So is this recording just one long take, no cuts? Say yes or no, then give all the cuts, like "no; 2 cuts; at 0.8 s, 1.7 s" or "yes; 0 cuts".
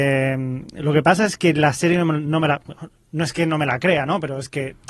yes; 0 cuts